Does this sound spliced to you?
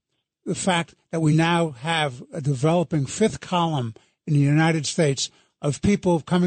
no; 0 cuts

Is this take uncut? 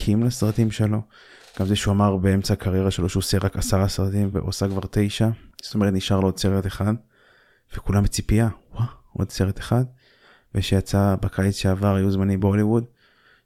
yes; 0 cuts

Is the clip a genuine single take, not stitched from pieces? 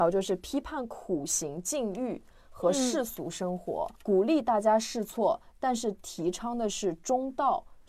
no; 1 cut; at 4.0 s

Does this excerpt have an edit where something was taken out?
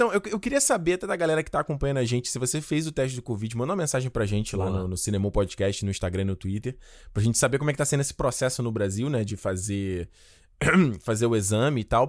no; 0 cuts

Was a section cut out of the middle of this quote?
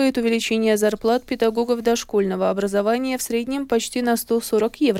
no; 0 cuts

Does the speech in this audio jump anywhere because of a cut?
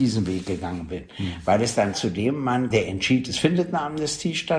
yes; 2 cuts; at 1.9 s, 2.7 s

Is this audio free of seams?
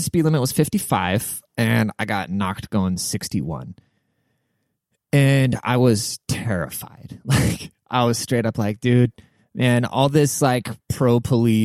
yes; 0 cuts

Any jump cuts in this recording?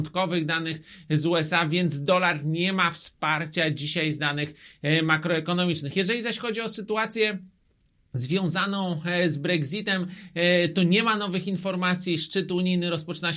no; 0 cuts

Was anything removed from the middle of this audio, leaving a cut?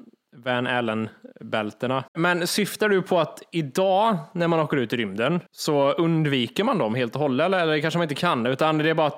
yes; 2 cuts; at 2.1 s, 5.5 s

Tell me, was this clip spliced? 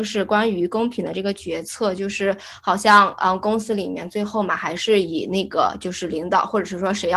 no; 0 cuts

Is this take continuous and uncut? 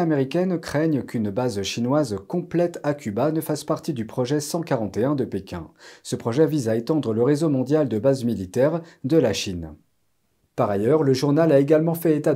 yes; 0 cuts

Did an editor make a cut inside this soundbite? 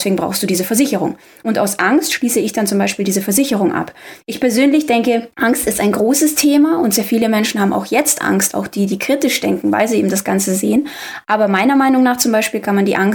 no; 0 cuts

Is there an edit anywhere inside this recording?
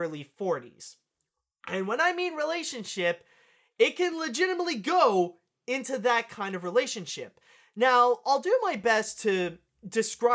no; 0 cuts

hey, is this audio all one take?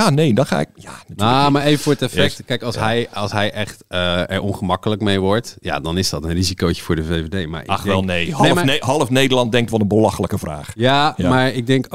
yes; 0 cuts

